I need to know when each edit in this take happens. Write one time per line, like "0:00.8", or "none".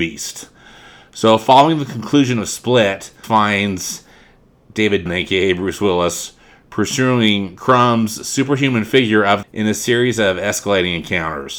0:03.2
0:05.1
0:09.4